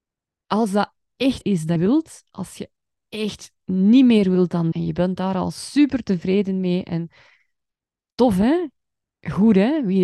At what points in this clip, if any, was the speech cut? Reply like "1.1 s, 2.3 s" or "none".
1.4 s, 1.8 s, 4.7 s